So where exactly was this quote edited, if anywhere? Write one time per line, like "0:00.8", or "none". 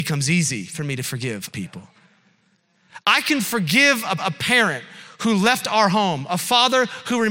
0:01.5
0:04.2